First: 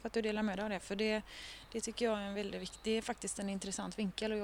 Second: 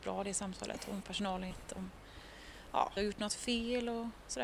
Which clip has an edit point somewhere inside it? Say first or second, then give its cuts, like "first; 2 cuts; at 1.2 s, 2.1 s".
second; 3 cuts; at 1.0 s, 1.5 s, 3.0 s